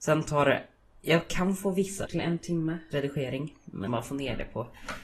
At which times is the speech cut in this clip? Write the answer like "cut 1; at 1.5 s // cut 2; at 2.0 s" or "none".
cut 1; at 2.1 s // cut 2; at 2.9 s // cut 3; at 3.9 s